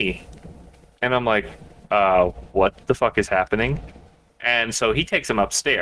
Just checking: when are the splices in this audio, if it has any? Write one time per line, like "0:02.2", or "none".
none